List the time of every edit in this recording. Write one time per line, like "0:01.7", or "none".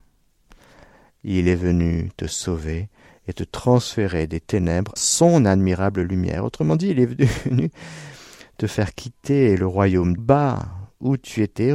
0:05.0
0:10.2